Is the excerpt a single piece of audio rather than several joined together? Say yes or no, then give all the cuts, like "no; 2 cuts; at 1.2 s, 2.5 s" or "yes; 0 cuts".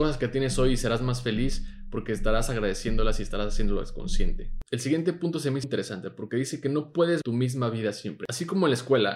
no; 2 cuts; at 5.6 s, 7.2 s